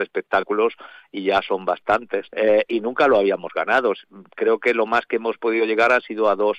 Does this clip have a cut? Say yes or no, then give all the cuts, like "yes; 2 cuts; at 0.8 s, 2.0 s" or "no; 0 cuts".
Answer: yes; 1 cut; at 2.3 s